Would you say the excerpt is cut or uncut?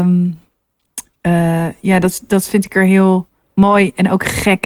uncut